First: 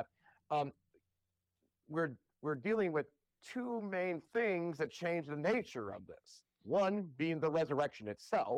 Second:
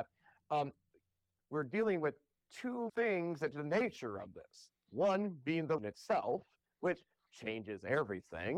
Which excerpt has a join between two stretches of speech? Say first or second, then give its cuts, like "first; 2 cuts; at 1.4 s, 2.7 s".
second; 4 cuts; at 1.4 s, 2.9 s, 3.5 s, 5.8 s